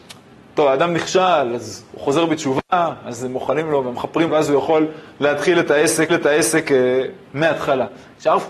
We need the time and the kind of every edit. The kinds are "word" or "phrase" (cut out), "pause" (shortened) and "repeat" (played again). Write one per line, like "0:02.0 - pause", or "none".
0:04.3 - phrase
0:06.1 - repeat